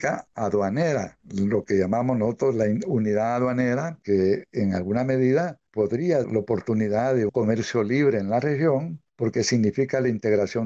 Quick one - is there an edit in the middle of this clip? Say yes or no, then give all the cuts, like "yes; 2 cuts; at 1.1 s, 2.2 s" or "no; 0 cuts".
yes; 2 cuts; at 6.2 s, 7.3 s